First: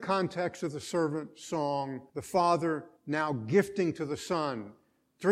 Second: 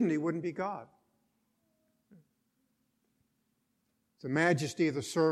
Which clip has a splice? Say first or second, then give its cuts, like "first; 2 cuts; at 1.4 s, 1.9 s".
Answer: first; 2 cuts; at 2.1 s, 3.0 s